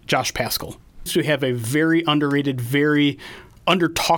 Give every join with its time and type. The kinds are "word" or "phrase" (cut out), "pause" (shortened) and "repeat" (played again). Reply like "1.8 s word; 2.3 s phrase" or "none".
1.1 s phrase